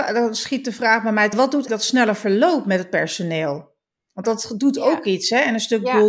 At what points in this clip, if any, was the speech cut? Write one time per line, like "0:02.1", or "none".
0:01.3
0:01.7
0:04.2